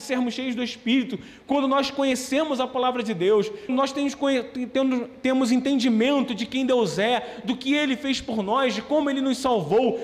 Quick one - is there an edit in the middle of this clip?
yes; 1 cut; at 3.7 s

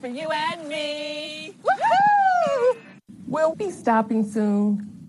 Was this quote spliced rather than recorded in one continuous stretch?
yes; 1 cut; at 3.5 s

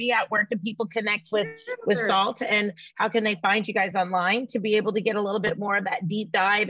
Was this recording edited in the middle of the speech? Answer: no; 0 cuts

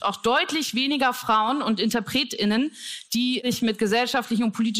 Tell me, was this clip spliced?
no; 0 cuts

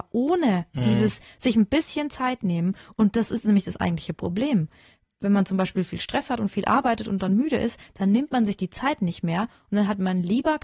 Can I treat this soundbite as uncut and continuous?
yes; 0 cuts

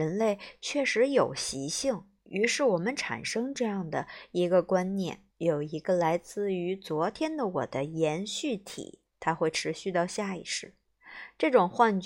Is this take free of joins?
no; 2 cuts; at 5.3 s, 9.1 s

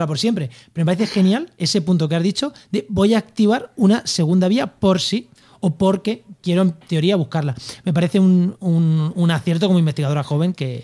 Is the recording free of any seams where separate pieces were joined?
yes; 0 cuts

